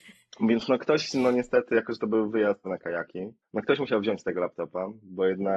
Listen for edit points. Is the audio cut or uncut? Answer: cut